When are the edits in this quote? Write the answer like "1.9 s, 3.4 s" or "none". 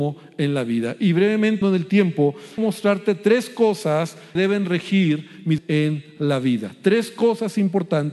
1.6 s, 2.6 s, 4.4 s, 5.6 s